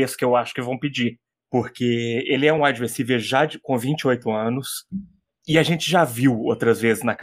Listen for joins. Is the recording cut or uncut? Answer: uncut